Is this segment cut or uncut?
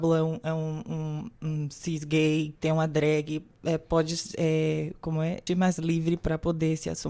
cut